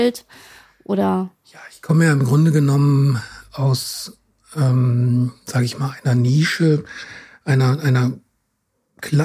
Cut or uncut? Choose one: uncut